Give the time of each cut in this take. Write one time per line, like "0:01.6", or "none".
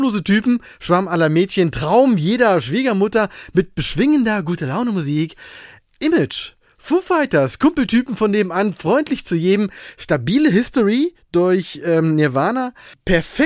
none